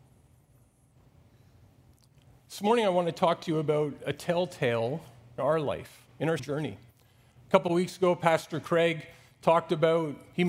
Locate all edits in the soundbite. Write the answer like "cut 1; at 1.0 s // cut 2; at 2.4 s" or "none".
cut 1; at 5.4 s // cut 2; at 6.1 s // cut 3; at 6.4 s